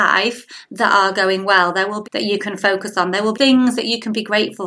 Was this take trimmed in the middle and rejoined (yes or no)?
yes